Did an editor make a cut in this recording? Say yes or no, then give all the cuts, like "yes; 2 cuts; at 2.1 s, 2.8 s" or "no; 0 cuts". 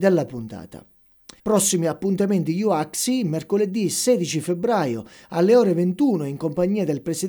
yes; 1 cut; at 1.4 s